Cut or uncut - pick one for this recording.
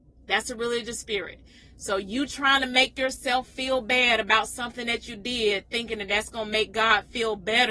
uncut